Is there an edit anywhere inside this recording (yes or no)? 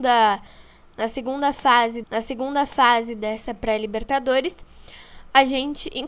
yes